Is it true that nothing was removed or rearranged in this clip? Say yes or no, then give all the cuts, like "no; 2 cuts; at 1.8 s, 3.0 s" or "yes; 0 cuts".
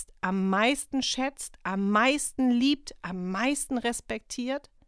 yes; 0 cuts